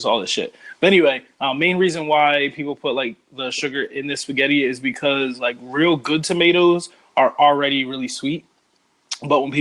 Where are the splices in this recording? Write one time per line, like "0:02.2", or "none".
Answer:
none

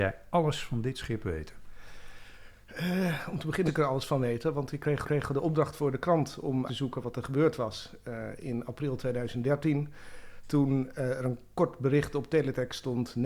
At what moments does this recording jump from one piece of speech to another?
0:03.7
0:05.0
0:06.7

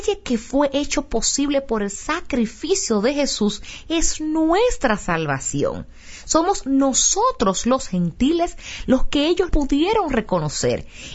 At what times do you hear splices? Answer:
0:09.5

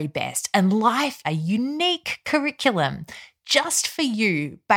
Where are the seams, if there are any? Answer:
0:01.2

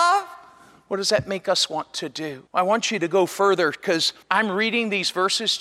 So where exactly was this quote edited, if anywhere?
0:02.5
0:04.2

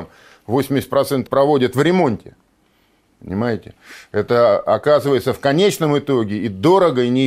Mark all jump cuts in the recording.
0:01.3

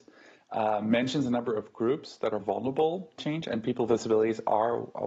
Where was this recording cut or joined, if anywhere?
0:02.4
0:03.2

